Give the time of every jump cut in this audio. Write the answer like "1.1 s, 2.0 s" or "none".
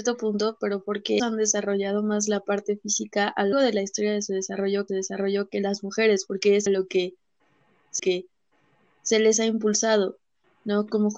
1.2 s, 3.5 s, 4.9 s, 6.7 s, 8.0 s

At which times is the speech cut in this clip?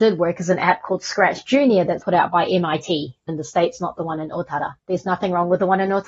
2.0 s, 3.3 s, 4.8 s

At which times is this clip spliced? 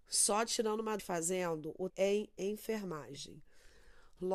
1.0 s, 1.9 s

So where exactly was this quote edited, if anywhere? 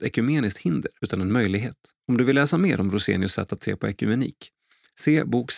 1.0 s, 2.0 s

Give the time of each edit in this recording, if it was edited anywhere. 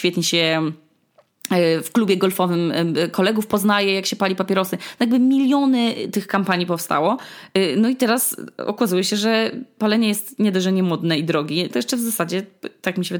11.7 s

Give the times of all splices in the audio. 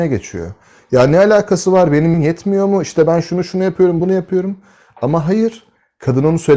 2.1 s, 4.0 s

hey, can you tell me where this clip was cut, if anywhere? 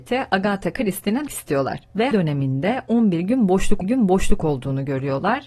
1.3 s, 2.1 s, 3.8 s

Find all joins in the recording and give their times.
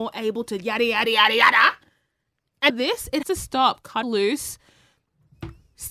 1.0 s, 2.7 s, 3.2 s, 4.0 s

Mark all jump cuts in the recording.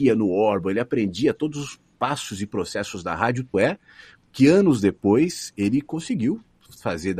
3.5 s

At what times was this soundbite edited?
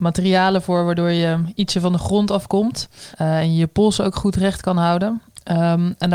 3.1 s

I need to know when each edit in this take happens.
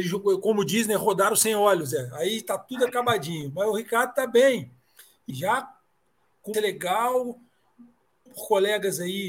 5.3 s, 6.5 s, 8.3 s

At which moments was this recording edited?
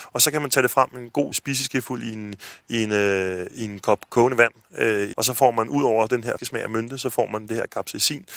1.3 s, 5.1 s, 6.4 s

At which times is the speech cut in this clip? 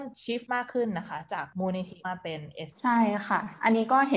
2.7 s

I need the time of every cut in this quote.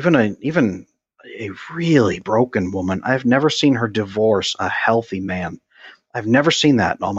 none

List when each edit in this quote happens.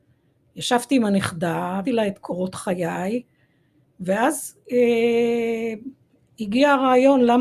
1.8 s, 4.6 s

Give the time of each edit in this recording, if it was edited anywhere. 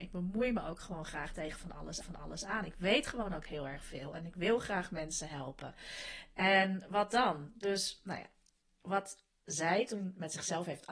2.0 s

